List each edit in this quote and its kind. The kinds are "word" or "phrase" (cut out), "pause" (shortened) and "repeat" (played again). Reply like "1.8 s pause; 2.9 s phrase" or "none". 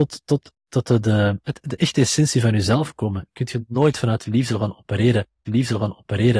1.4 s word; 5.4 s repeat